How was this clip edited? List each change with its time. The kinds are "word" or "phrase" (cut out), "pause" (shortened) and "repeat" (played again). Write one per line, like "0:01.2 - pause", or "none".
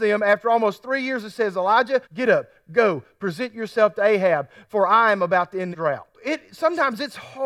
0:02.0 - pause
0:05.7 - word
0:06.1 - pause